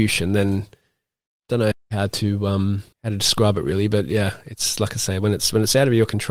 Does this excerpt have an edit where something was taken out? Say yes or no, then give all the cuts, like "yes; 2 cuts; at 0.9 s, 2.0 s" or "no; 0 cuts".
yes; 2 cuts; at 1.7 s, 2.9 s